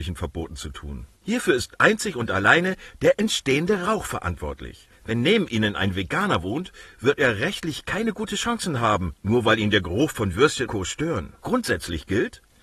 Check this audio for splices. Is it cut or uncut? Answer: cut